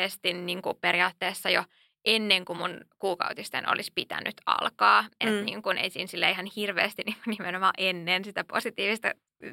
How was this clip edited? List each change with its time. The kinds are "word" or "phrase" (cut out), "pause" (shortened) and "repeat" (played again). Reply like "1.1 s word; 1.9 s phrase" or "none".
none